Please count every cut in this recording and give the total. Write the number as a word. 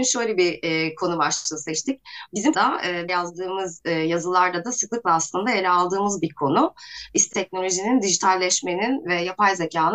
three